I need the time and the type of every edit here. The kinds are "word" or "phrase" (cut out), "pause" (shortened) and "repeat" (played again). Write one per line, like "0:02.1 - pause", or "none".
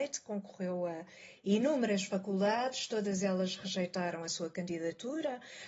none